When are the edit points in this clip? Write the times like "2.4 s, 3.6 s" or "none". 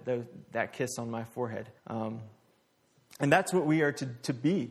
1.8 s